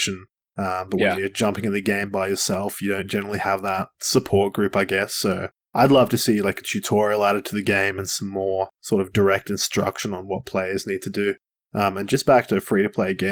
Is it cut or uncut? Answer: uncut